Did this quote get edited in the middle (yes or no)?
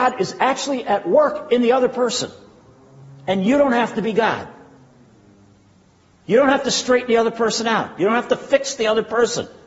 no